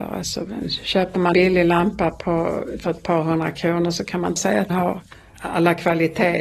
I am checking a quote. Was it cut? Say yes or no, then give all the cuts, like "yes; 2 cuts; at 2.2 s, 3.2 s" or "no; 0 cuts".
yes; 4 cuts; at 1.3 s, 4.4 s, 4.7 s, 5.1 s